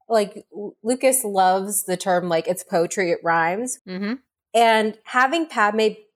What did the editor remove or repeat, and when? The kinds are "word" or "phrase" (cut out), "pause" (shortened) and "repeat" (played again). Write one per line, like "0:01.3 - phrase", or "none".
0:03.8 - phrase